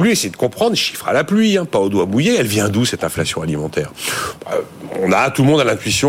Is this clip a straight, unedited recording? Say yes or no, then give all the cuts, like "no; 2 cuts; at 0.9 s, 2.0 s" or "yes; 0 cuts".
yes; 0 cuts